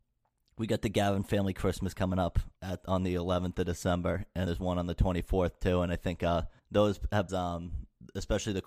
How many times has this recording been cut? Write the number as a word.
four